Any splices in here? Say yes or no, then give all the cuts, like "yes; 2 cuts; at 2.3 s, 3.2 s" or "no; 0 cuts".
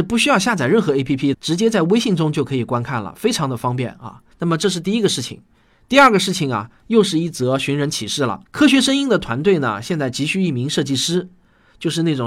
yes; 3 cuts; at 1.3 s, 4.3 s, 8.5 s